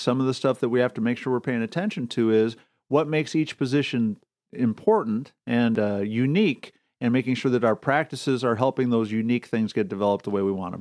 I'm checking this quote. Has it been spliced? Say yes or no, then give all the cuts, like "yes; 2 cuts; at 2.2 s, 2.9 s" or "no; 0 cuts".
no; 0 cuts